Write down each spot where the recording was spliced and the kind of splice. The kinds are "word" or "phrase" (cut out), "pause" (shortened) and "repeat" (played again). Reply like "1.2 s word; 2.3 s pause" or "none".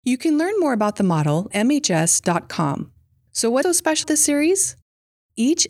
1.5 s word; 3.6 s word; 4.0 s word